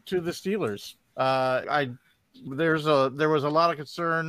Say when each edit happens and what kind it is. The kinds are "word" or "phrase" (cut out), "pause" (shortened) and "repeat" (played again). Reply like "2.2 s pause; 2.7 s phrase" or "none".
1.6 s word; 2.5 s word